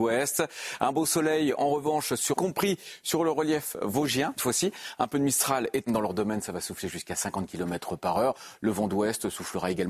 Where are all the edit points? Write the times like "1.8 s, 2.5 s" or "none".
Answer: 2.4 s, 4.4 s, 5.9 s

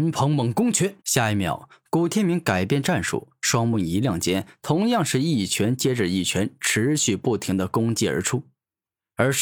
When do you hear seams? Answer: 1.0 s

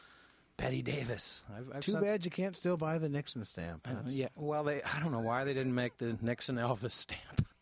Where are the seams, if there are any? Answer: none

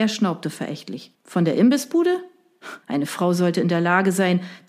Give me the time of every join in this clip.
1.1 s, 2.8 s

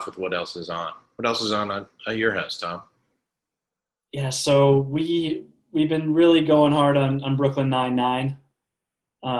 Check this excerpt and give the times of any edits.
none

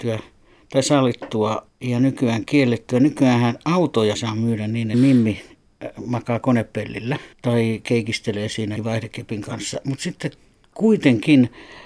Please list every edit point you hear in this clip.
1.7 s, 4.1 s, 4.9 s, 7.3 s, 8.8 s

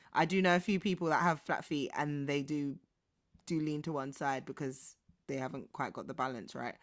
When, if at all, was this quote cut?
none

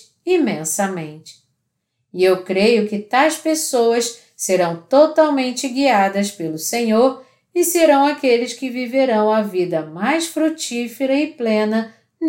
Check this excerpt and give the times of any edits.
none

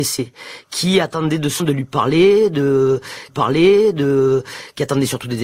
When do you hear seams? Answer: 1.6 s, 3.3 s

